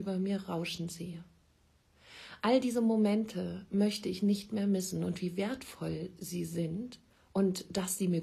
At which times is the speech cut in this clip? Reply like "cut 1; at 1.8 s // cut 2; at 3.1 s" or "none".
none